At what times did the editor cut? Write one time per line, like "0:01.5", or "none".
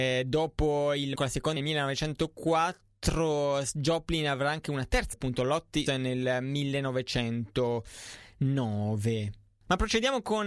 0:01.2
0:01.6
0:05.1
0:05.9